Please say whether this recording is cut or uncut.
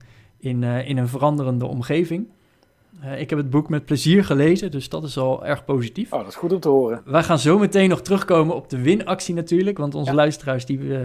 uncut